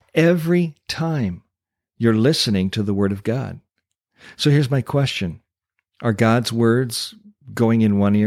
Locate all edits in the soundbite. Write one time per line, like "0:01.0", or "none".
none